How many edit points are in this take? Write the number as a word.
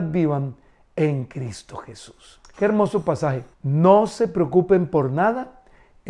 two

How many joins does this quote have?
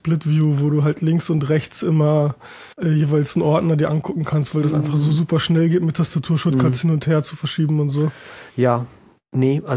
one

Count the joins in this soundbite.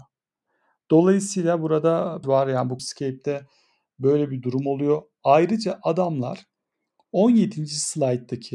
two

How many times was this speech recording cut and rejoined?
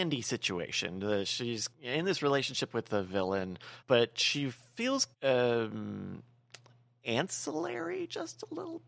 three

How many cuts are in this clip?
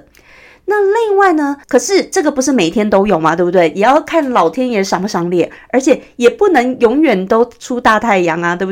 one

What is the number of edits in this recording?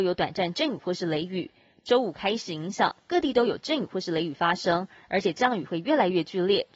zero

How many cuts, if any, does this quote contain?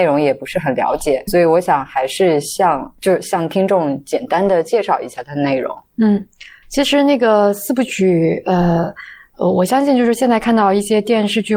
two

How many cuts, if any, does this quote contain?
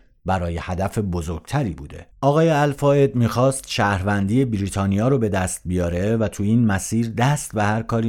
one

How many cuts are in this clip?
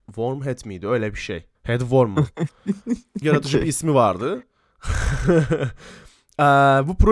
two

